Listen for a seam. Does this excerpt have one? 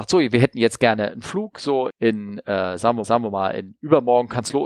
yes; 2 cuts; at 1.9 s, 3.0 s

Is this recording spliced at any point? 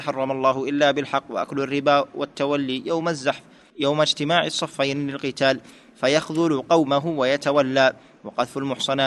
no; 0 cuts

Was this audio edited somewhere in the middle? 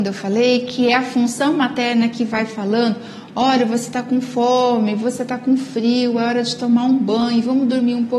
no; 0 cuts

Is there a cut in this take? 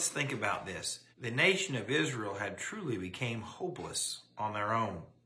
yes; 1 cut; at 1.1 s

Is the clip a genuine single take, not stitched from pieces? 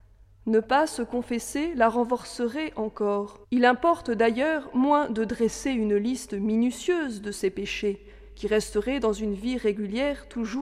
no; 1 cut; at 3.4 s

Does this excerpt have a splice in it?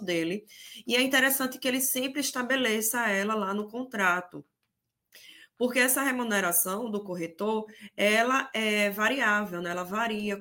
no; 0 cuts

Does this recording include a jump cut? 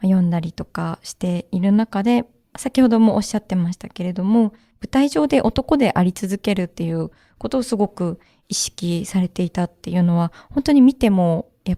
no; 0 cuts

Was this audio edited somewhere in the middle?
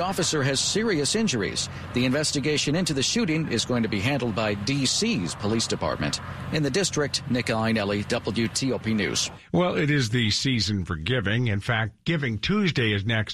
no; 0 cuts

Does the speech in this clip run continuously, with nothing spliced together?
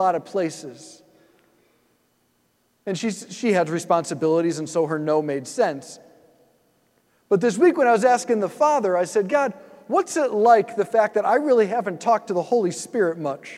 yes; 0 cuts

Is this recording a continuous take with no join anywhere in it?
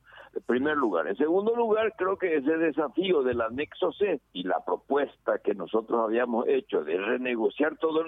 no; 1 cut; at 4.2 s

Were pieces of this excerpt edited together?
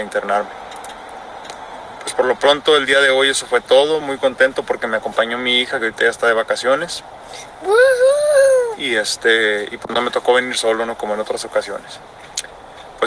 no; 0 cuts

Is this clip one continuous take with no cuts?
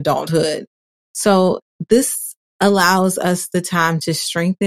yes; 0 cuts

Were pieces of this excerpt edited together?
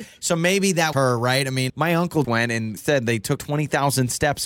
yes; 5 cuts; at 0.9 s, 1.7 s, 2.2 s, 2.8 s, 3.4 s

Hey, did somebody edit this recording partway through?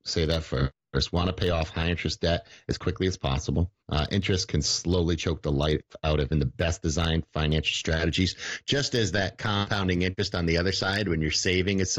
yes; 2 cuts; at 3.8 s, 6.3 s

